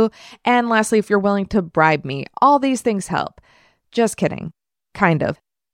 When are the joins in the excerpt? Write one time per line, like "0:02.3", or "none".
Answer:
none